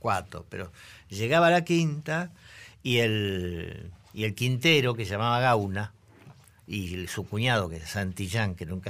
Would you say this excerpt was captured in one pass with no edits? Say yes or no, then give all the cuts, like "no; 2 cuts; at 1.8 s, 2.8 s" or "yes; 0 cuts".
yes; 0 cuts